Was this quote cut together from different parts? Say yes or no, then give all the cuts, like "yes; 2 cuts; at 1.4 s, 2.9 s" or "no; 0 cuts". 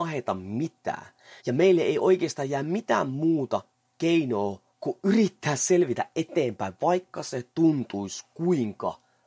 yes; 2 cuts; at 1.4 s, 4.7 s